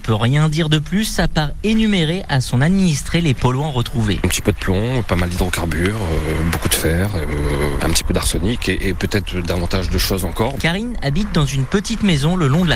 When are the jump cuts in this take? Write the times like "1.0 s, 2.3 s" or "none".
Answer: none